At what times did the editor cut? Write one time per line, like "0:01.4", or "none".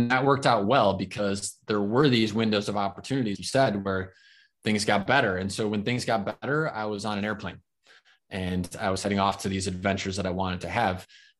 0:03.4